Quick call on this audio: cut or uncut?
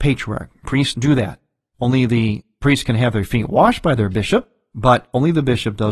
cut